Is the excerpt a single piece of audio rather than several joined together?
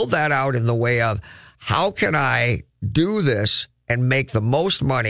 yes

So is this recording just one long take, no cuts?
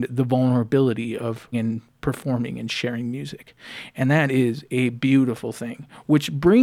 no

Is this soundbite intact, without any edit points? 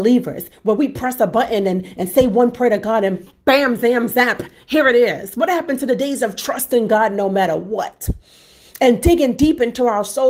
yes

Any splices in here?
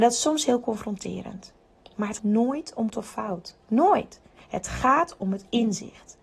yes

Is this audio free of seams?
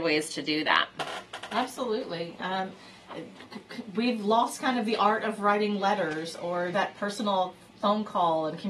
no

